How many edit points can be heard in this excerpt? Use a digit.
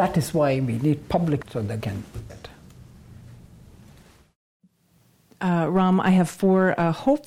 3